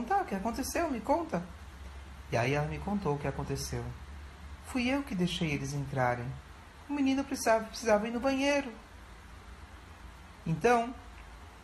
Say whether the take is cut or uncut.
uncut